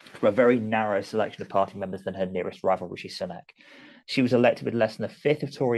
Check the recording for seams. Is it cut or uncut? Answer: uncut